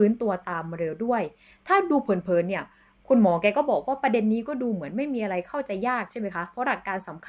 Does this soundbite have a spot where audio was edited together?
no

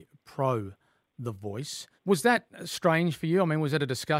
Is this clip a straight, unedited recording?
no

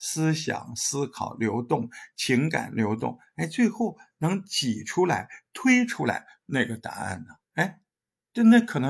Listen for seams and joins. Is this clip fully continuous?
no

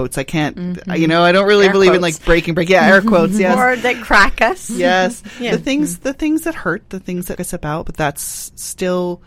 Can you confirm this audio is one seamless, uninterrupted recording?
no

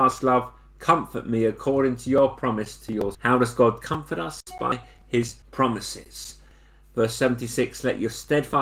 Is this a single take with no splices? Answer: no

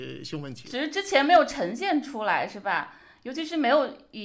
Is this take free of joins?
yes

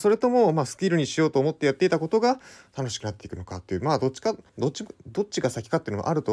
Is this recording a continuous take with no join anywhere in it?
no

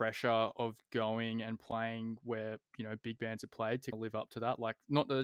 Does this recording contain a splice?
yes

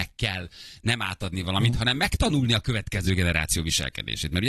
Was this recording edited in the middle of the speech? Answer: no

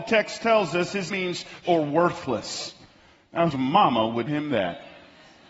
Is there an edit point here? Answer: yes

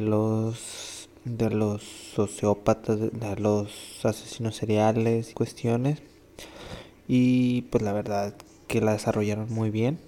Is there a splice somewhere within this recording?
yes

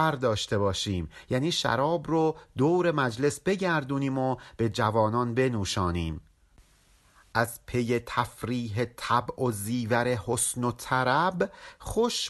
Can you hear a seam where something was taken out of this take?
no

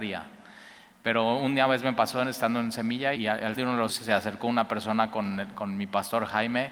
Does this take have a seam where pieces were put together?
yes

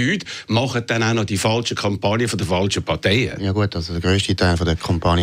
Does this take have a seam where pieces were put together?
no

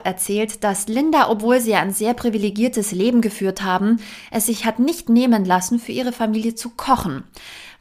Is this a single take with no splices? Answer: yes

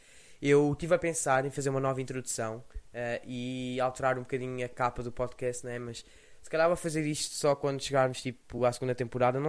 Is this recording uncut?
yes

